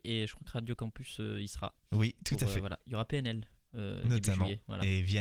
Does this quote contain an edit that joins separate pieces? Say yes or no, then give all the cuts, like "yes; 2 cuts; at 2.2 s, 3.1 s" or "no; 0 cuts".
no; 0 cuts